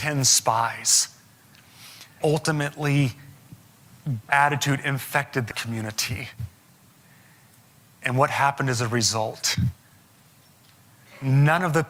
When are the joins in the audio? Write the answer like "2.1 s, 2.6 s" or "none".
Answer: 2.2 s, 4.3 s, 5.5 s